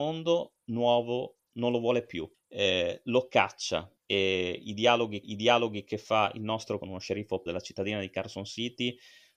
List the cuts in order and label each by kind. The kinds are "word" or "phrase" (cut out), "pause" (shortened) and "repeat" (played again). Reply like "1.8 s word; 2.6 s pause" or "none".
2.3 s pause; 4.0 s pause; 5.2 s repeat; 6.8 s phrase; 7.5 s word